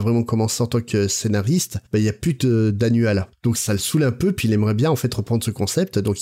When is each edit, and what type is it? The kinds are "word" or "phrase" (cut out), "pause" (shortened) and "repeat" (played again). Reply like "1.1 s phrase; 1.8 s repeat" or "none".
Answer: 1.9 s pause